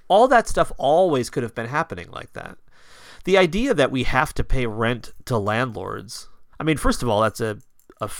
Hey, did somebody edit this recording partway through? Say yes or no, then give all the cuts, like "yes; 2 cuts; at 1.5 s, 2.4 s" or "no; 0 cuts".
yes; 1 cut; at 6.5 s